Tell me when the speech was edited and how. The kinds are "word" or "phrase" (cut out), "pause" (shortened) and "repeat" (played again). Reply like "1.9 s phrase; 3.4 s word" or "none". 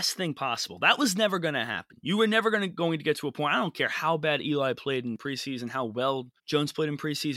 6.4 s pause